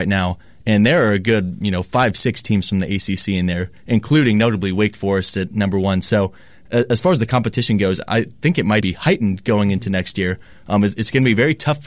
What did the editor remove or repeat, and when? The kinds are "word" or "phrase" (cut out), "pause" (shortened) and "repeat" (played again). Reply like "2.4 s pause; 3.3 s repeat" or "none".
8.8 s word